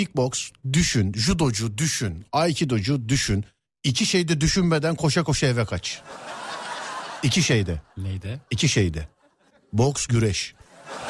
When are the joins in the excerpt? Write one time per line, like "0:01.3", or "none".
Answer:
none